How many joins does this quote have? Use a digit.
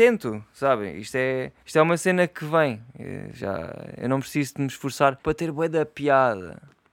2